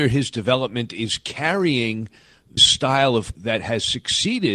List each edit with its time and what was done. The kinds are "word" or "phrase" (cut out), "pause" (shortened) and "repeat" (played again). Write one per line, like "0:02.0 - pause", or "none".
0:02.6 - word
0:03.4 - word